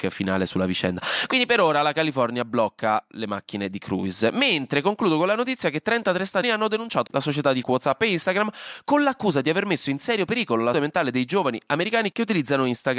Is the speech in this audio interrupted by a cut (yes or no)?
yes